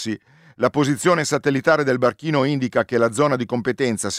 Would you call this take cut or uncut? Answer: uncut